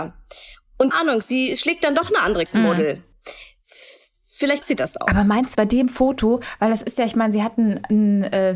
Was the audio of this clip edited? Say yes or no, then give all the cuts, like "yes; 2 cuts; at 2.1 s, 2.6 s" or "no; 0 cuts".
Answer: yes; 4 cuts; at 0.9 s, 2.5 s, 4.6 s, 5.5 s